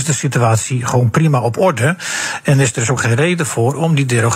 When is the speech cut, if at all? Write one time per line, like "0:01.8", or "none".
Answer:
0:03.0